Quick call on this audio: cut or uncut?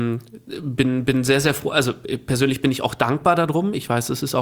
uncut